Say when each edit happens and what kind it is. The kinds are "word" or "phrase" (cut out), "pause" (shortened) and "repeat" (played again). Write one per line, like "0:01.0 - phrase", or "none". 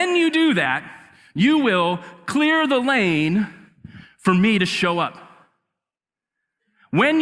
none